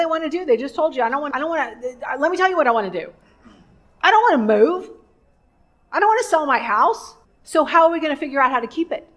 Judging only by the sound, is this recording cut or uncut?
cut